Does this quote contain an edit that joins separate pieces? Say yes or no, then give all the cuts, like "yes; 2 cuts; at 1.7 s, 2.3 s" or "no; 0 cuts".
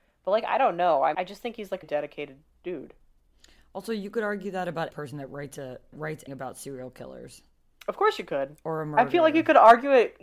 yes; 5 cuts; at 1.1 s, 1.8 s, 4.9 s, 5.9 s, 6.3 s